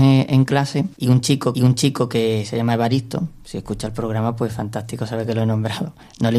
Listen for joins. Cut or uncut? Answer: cut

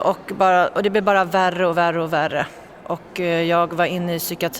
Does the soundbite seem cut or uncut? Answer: uncut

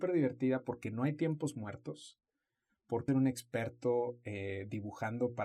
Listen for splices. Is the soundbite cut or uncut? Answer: cut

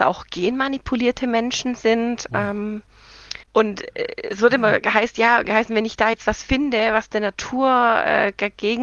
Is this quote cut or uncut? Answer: cut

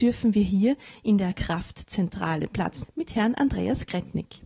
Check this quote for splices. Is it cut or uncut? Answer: cut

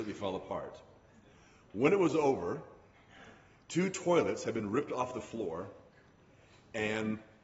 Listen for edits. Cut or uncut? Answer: uncut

